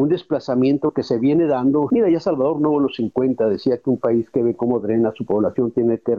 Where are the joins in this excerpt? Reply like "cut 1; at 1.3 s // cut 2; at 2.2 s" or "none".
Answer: none